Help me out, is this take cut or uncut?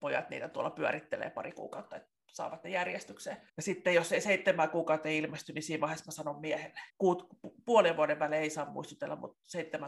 cut